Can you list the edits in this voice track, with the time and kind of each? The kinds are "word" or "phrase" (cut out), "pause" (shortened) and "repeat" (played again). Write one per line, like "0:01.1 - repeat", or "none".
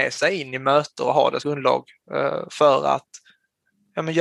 0:01.4 - word

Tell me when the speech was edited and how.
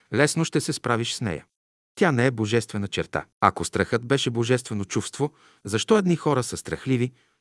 0:03.3 - pause

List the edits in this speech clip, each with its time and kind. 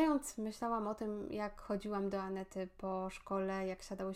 none

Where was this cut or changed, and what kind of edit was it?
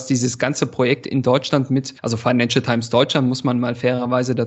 0:02.0 - pause

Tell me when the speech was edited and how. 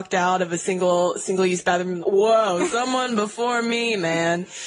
0:02.0 - word

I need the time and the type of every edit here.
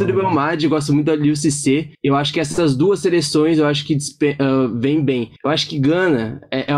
0:01.9 - pause
0:05.4 - pause

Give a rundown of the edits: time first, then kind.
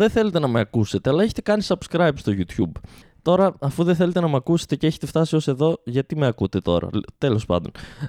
none

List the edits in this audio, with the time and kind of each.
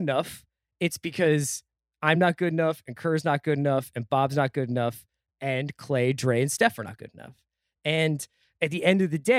none

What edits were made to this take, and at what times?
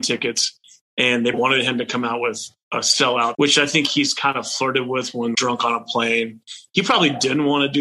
0:01.3 - word
0:03.3 - word
0:05.3 - word

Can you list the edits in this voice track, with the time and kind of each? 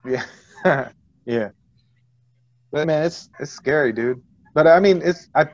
0:02.8 - word
0:03.3 - pause

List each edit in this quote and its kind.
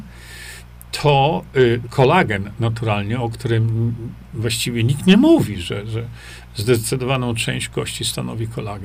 0:01.8 - phrase

